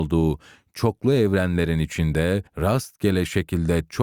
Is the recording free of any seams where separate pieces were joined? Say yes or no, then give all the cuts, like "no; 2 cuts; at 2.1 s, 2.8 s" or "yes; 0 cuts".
no; 1 cut; at 2.5 s